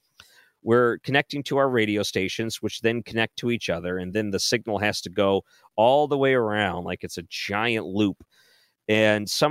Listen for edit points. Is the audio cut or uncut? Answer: uncut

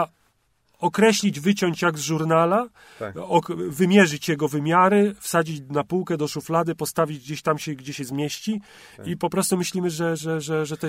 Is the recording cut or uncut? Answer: uncut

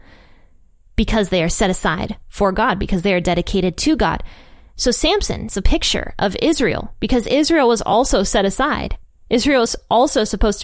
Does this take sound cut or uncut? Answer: uncut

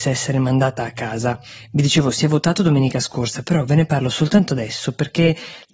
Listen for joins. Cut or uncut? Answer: uncut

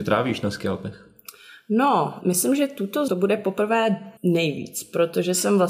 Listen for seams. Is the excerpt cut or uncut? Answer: cut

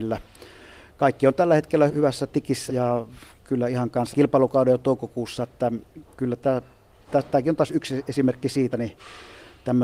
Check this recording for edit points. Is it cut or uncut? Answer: cut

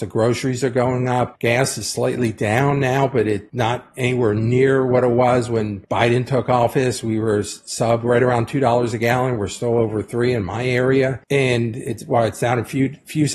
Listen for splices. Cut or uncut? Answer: uncut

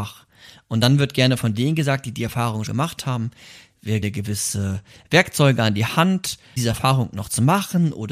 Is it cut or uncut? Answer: cut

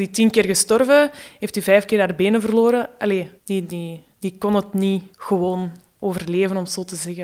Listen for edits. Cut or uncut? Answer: cut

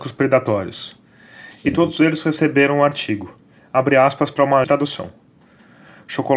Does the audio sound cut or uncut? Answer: cut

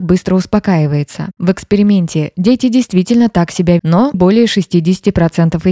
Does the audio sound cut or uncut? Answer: cut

